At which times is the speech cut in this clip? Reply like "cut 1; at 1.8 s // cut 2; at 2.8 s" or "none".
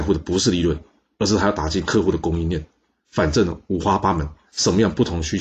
none